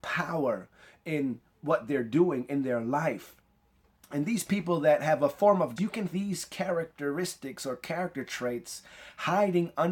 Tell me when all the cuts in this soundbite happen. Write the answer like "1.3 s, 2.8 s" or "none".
5.8 s, 6.1 s